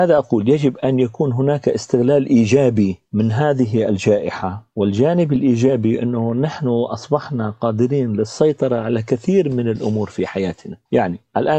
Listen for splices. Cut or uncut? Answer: uncut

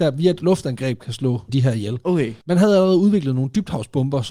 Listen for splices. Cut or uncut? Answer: cut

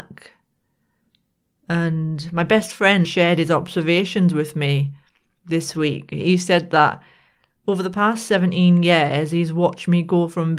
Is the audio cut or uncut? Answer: cut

